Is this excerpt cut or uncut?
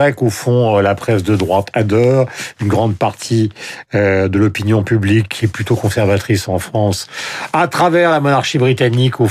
uncut